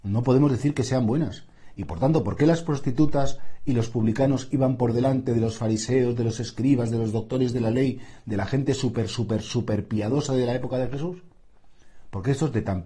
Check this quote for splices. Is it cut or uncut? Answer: uncut